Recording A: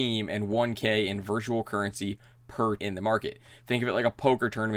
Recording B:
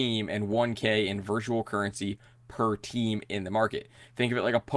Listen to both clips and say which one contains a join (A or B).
A